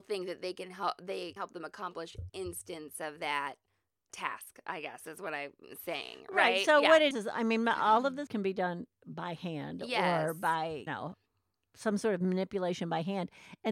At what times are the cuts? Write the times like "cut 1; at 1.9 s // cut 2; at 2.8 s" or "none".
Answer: cut 1; at 1.4 s // cut 2; at 2.3 s // cut 3; at 4.1 s // cut 4; at 7.1 s // cut 5; at 8.3 s // cut 6; at 10.9 s